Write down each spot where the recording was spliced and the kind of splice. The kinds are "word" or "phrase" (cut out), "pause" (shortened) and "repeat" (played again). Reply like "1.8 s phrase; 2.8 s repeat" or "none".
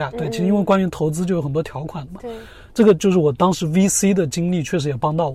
none